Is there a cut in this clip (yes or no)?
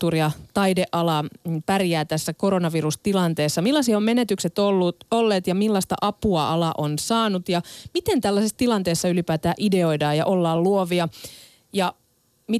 no